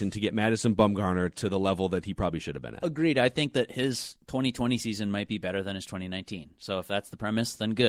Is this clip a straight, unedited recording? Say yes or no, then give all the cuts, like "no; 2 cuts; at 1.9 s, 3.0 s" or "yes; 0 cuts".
yes; 0 cuts